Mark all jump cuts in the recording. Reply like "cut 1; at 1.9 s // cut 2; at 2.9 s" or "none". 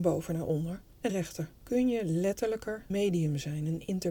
cut 1; at 1.1 s // cut 2; at 2.9 s